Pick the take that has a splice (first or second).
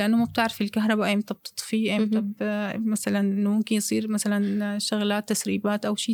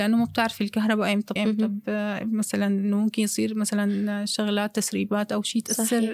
second